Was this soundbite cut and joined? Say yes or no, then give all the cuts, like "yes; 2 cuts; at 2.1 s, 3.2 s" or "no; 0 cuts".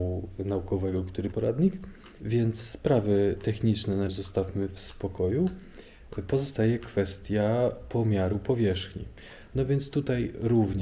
yes; 2 cuts; at 1.3 s, 4.1 s